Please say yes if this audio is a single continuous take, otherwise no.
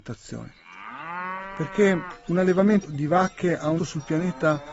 no